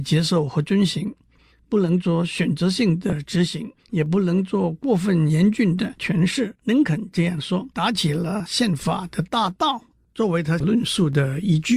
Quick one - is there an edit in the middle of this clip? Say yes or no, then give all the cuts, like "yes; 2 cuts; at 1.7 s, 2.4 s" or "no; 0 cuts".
yes; 3 cuts; at 3.8 s, 6.6 s, 7.7 s